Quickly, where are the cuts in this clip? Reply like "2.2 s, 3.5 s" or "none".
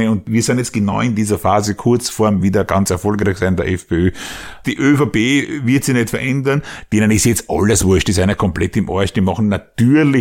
none